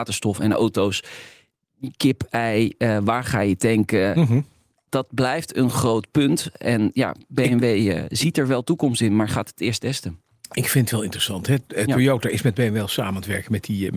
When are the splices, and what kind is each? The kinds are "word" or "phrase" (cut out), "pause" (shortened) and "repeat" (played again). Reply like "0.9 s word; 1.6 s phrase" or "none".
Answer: none